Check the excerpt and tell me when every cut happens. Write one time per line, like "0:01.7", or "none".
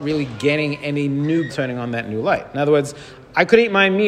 0:01.5